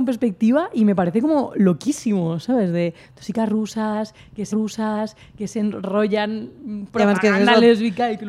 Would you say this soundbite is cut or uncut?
cut